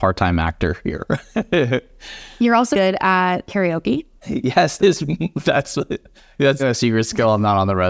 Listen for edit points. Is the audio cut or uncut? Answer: cut